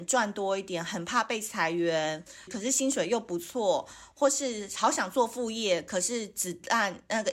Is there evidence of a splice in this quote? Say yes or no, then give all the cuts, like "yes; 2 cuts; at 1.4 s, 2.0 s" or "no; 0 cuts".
yes; 1 cut; at 2.5 s